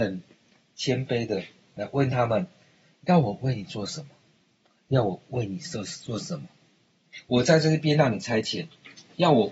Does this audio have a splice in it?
no; 0 cuts

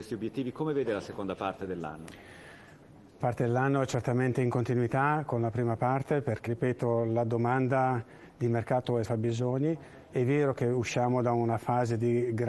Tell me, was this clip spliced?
yes; 3 cuts; at 3.2 s, 6.5 s, 9.0 s

